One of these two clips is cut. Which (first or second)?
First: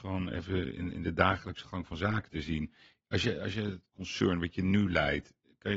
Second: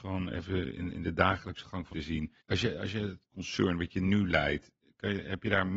second